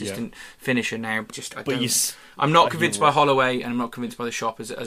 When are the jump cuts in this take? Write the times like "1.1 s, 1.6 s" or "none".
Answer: 1.3 s